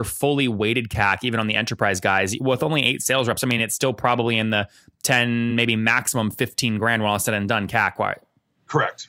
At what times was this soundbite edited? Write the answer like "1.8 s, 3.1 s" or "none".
none